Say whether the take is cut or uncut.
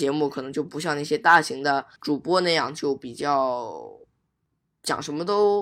cut